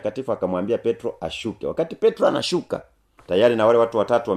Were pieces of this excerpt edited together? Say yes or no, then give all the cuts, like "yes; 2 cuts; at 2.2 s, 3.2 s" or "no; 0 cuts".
no; 0 cuts